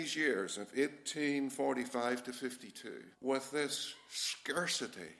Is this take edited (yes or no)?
yes